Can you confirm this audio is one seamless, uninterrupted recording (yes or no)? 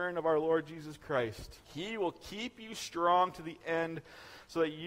no